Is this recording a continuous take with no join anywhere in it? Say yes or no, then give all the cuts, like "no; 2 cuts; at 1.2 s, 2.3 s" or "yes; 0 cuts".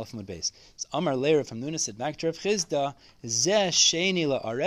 yes; 0 cuts